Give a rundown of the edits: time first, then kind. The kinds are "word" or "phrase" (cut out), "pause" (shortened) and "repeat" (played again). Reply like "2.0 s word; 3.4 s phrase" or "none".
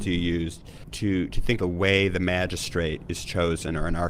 1.6 s word